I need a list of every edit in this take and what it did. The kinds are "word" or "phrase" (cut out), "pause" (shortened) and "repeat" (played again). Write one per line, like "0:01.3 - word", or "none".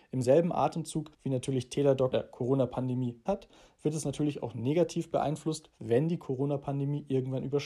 0:01.1 - pause
0:02.1 - word
0:03.3 - word

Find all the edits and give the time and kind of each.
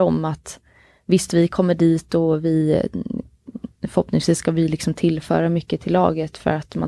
0:03.8 - pause

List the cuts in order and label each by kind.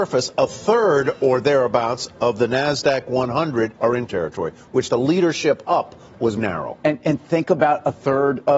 0:03.8 - pause
0:04.1 - word
0:04.9 - phrase
0:06.4 - word

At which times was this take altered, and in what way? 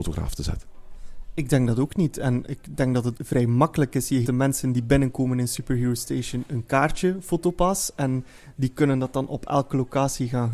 0:03.1 - word
0:04.2 - word

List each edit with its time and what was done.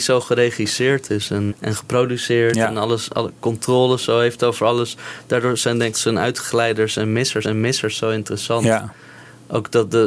0:01.5 - word
0:05.9 - word
0:07.4 - repeat

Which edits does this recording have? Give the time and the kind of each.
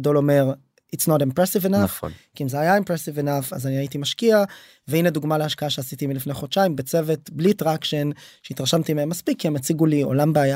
none

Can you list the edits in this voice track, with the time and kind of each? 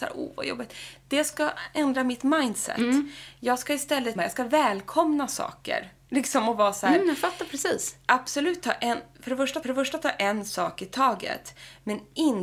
0:01.3 - word
0:04.2 - phrase
0:09.6 - repeat

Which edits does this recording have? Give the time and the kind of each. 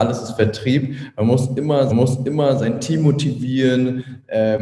0:01.9 - repeat

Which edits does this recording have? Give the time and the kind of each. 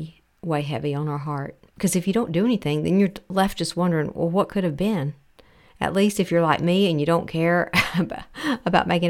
0:01.7 - pause

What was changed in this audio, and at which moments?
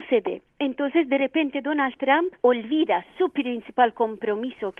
none

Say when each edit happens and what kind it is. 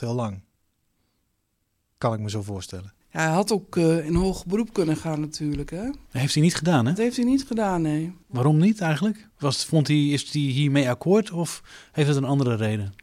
0:03.0 - pause
0:06.0 - pause
0:08.2 - pause
0:09.3 - pause

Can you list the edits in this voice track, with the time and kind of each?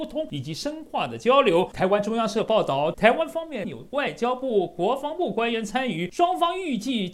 0:02.9 - phrase

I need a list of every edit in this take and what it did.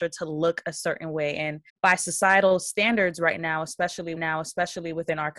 0:01.7 - pause
0:04.2 - repeat

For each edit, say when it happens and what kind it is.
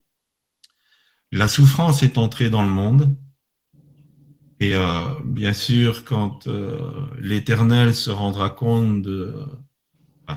none

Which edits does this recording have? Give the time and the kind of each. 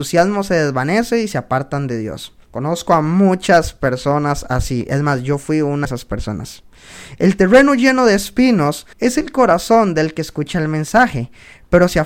0:02.4 - pause
0:05.8 - word
0:08.9 - pause

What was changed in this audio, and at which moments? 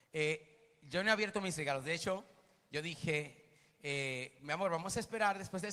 none

